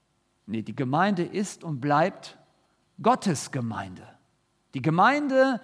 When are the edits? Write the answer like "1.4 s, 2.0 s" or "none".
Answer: none